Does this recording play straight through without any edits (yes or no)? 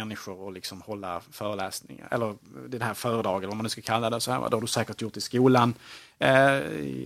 yes